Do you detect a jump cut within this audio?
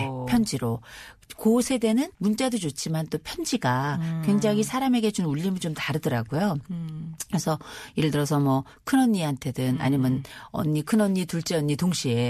yes; 1 cut; at 2.1 s

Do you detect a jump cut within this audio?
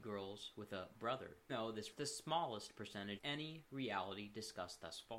yes; 4 cuts; at 0.9 s, 1.5 s, 1.9 s, 3.2 s

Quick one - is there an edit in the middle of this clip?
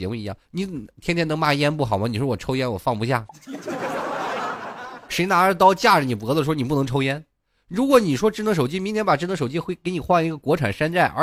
no; 0 cuts

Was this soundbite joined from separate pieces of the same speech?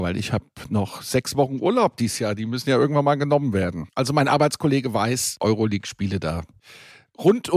no; 0 cuts

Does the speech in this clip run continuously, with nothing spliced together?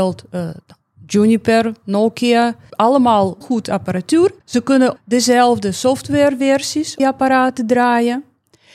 no; 4 cuts; at 3.4 s, 4.4 s, 5.0 s, 7.0 s

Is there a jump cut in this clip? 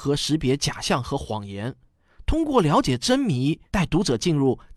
yes; 1 cut; at 3.7 s

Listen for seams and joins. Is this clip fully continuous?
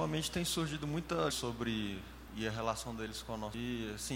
no; 2 cuts; at 1.3 s, 2.3 s

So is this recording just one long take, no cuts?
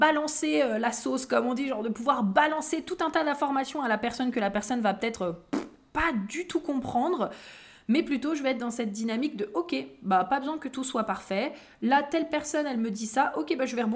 yes; 0 cuts

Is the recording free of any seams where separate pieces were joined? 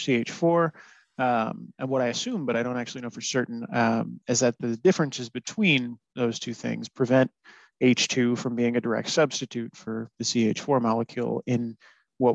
yes; 0 cuts

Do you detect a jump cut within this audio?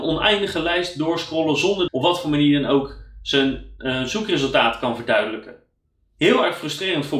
yes; 1 cut; at 1.9 s

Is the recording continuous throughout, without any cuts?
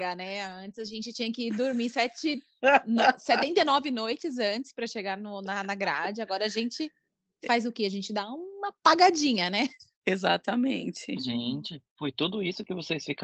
yes; 0 cuts

